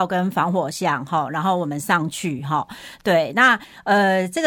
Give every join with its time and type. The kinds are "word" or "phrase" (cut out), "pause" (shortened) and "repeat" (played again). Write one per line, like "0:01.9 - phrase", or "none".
none